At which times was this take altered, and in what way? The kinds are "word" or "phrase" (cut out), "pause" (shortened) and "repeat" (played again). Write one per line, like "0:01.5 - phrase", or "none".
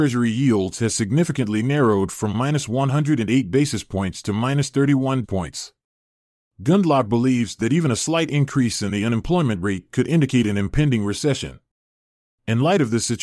0:05.2 - word